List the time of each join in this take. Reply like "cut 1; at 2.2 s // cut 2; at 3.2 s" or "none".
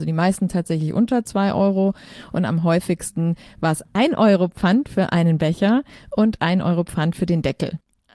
none

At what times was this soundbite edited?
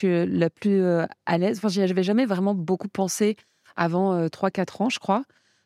none

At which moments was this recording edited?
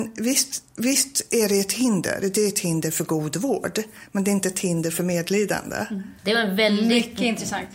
cut 1; at 6.2 s

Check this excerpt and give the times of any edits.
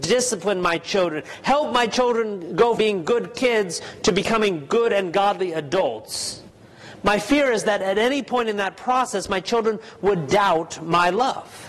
cut 1; at 2.8 s

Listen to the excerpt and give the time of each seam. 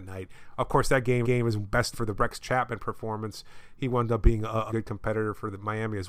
cut 1; at 1.2 s // cut 2; at 1.9 s // cut 3; at 4.7 s

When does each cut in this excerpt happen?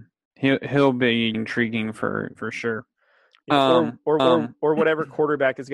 cut 1; at 1.3 s // cut 2; at 2.4 s // cut 3; at 4.2 s

